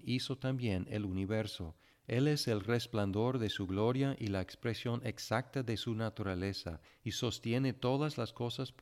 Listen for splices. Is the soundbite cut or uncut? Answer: uncut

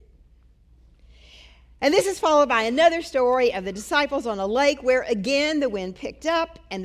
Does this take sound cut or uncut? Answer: uncut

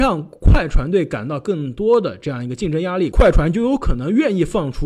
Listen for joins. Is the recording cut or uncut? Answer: uncut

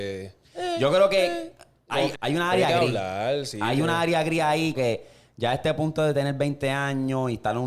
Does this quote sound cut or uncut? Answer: cut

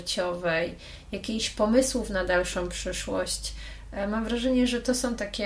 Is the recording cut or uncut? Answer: uncut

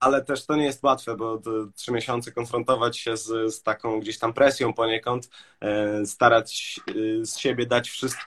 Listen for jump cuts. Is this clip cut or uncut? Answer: uncut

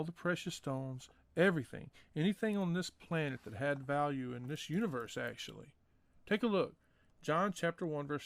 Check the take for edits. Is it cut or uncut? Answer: uncut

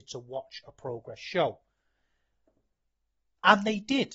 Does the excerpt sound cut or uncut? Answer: uncut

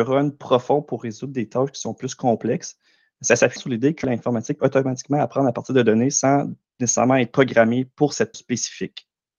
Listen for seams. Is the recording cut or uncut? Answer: cut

